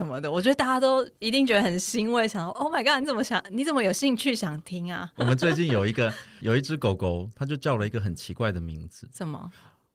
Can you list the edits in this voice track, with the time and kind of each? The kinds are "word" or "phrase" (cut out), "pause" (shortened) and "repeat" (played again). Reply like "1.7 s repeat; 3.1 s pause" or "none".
none